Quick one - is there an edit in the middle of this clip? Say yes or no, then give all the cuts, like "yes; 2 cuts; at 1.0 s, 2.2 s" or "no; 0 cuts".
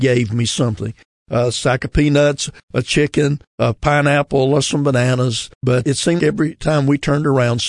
yes; 2 cuts; at 5.5 s, 6.2 s